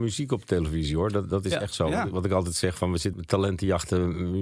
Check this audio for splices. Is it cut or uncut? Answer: cut